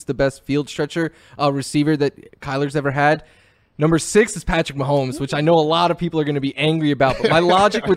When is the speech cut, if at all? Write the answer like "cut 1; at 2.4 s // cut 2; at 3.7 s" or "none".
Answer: none